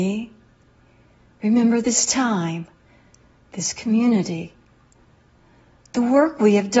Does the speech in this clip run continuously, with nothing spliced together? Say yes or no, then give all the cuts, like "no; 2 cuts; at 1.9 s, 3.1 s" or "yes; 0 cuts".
yes; 0 cuts